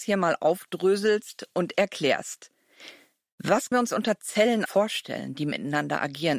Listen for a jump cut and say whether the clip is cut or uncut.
cut